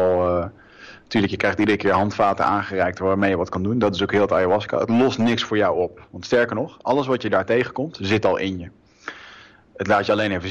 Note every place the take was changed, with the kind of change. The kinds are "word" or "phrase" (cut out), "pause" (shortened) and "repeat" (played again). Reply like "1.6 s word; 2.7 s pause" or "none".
none